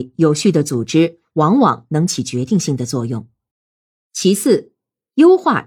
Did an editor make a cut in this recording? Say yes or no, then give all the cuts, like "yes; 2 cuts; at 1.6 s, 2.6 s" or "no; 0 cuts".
yes; 1 cut; at 3.5 s